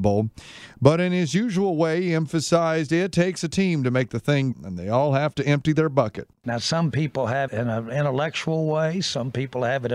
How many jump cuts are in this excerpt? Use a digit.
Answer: 2